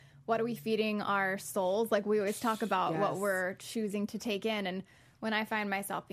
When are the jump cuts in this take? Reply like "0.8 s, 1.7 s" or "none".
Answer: none